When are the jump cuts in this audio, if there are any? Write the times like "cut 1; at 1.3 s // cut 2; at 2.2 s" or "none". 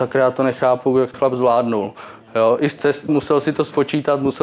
cut 1; at 1.1 s // cut 2; at 3.1 s